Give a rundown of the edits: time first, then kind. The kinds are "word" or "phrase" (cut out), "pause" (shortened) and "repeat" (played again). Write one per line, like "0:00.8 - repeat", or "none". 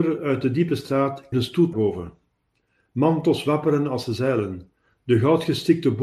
0:01.3 - word
0:01.7 - word